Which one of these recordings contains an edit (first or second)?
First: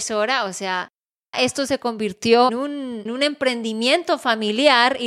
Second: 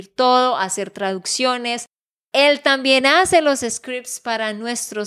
first